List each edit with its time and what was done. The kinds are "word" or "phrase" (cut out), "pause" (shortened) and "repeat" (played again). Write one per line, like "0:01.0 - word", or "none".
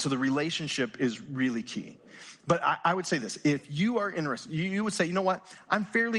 none